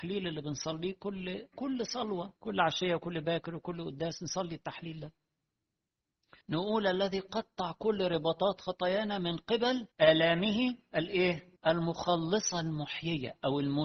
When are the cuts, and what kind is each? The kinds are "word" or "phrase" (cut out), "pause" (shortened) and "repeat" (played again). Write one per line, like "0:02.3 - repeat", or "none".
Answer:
0:02.4 - pause
0:06.4 - pause
0:09.9 - pause
0:11.6 - pause